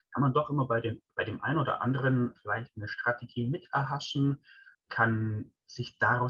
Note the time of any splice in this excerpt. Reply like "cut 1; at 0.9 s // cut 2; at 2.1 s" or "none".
cut 1; at 1.1 s // cut 2; at 2.4 s // cut 3; at 4.7 s